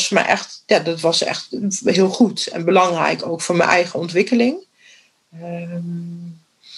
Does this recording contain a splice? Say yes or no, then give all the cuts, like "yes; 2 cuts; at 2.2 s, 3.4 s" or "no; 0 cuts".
no; 0 cuts